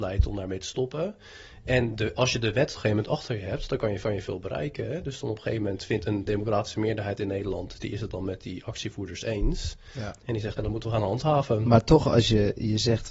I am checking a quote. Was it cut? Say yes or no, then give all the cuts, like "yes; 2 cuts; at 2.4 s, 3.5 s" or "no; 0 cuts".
yes; 3 cuts; at 2.8 s, 4.0 s, 10.6 s